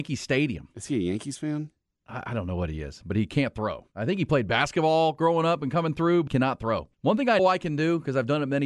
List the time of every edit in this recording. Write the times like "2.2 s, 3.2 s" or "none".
3.9 s, 6.3 s, 6.9 s, 7.4 s